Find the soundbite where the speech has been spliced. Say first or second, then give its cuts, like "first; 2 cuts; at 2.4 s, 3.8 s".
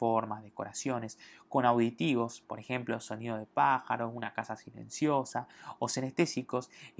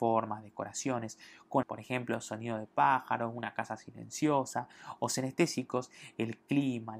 second; 1 cut; at 1.6 s